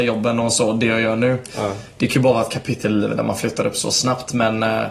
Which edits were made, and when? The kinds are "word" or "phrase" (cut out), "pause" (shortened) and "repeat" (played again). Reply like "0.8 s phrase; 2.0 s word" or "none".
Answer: none